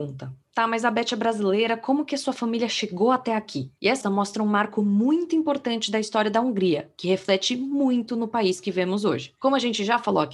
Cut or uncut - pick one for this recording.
cut